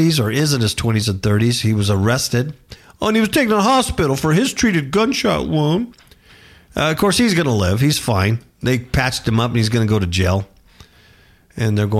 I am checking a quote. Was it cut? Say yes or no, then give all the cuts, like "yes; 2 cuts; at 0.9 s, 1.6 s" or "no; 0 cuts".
no; 0 cuts